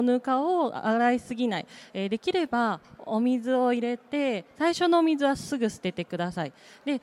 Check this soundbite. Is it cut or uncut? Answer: uncut